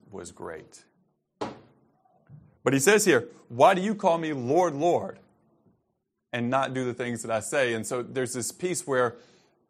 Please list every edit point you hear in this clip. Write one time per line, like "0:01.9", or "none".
none